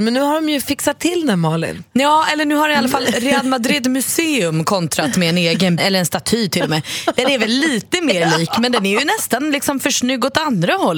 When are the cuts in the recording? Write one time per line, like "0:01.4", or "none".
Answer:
0:05.8